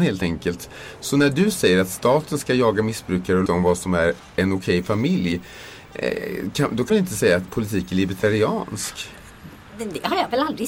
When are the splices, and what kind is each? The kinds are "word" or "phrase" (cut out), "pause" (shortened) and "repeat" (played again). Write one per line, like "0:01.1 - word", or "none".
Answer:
0:03.5 - word
0:06.9 - word
0:07.5 - word